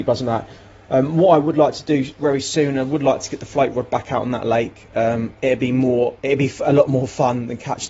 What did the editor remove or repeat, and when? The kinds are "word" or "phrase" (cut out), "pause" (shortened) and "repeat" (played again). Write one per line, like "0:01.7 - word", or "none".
0:05.4 - pause
0:06.2 - pause